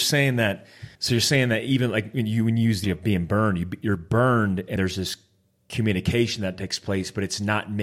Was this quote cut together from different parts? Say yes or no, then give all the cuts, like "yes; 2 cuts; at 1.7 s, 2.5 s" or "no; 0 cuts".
yes; 3 cuts; at 1.0 s, 2.8 s, 4.8 s